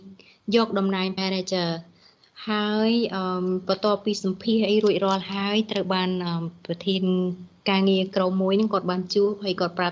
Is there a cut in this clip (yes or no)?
yes